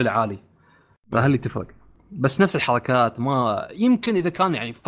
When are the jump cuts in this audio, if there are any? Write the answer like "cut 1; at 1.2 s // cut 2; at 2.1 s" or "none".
none